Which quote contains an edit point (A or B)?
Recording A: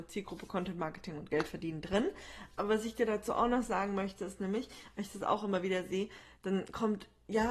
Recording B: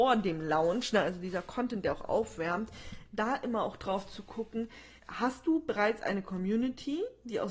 B